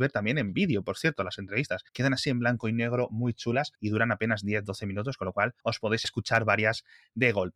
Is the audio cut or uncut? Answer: cut